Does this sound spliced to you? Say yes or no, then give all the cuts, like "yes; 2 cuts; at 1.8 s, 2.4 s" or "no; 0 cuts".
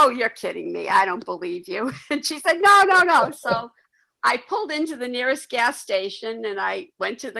no; 0 cuts